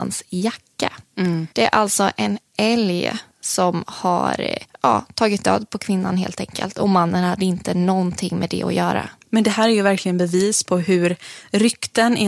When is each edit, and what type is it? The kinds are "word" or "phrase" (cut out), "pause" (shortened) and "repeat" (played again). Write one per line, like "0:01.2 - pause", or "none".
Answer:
0:01.5 - pause
0:09.2 - pause